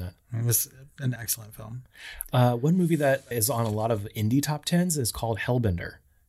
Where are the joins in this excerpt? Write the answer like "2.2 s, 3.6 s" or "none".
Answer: 1.2 s, 3.3 s

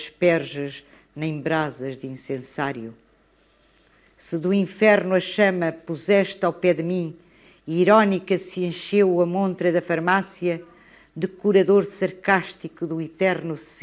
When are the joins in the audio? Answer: none

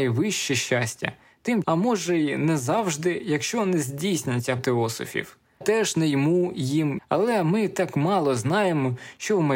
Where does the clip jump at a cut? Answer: 1.6 s, 4.6 s, 5.6 s, 7.0 s

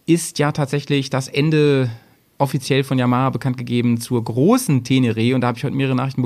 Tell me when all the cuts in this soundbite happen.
none

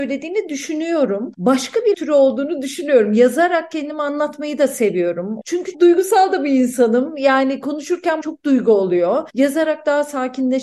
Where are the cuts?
1.9 s, 5.7 s, 8.2 s

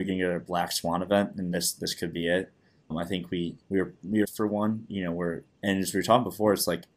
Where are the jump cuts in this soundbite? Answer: 2.9 s, 3.6 s, 4.2 s, 5.5 s

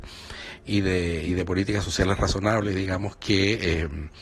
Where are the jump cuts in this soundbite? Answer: none

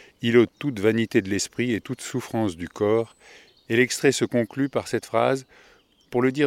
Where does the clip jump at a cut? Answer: none

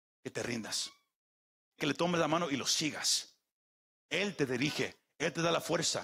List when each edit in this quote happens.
1.8 s

